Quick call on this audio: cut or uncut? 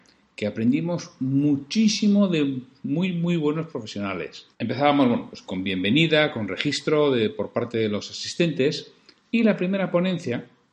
cut